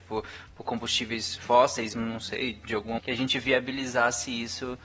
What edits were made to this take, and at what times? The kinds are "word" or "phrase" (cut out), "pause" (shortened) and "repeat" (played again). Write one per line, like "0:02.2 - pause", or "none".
0:01.4 - word
0:01.9 - word
0:03.0 - word